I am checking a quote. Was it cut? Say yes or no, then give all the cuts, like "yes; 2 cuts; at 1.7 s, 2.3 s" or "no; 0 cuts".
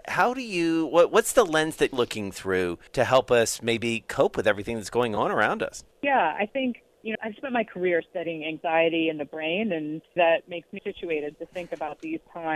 yes; 6 cuts; at 1.9 s, 2.9 s, 5.9 s, 7.1 s, 10.2 s, 10.8 s